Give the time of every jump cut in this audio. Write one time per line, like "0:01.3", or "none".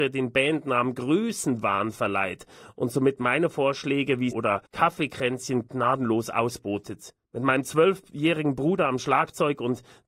0:04.3
0:04.7
0:07.2